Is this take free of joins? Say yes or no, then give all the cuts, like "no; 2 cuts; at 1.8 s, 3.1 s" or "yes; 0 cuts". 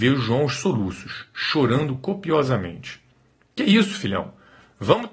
yes; 0 cuts